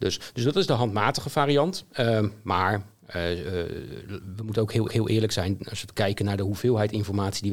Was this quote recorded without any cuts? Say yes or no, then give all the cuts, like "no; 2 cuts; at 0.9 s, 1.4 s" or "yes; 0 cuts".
no; 1 cut; at 4.9 s